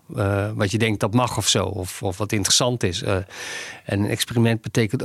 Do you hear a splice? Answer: no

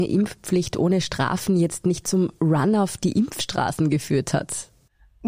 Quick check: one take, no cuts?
yes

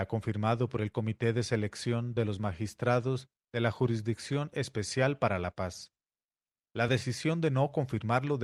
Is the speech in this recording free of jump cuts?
yes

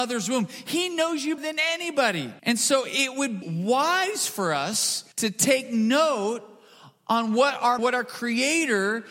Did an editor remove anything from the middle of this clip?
yes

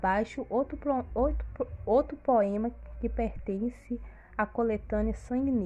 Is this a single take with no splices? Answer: yes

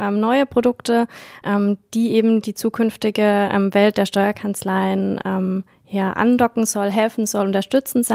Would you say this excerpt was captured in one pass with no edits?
yes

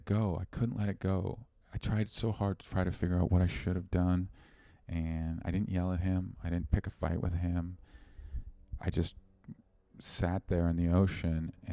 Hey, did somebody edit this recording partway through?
no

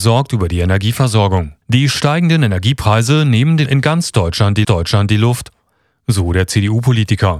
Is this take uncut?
no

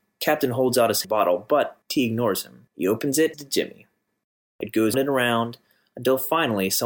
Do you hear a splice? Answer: yes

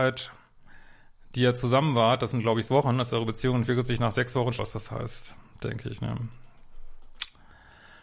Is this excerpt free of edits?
no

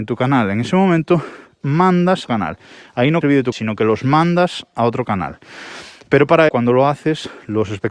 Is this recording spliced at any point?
yes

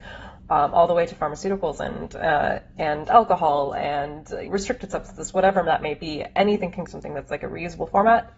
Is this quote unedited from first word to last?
no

